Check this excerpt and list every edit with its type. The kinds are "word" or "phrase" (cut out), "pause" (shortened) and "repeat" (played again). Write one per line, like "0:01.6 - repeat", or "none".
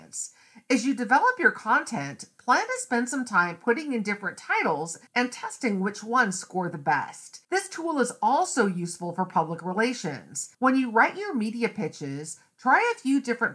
0:05.1 - pause
0:07.4 - pause
0:10.5 - pause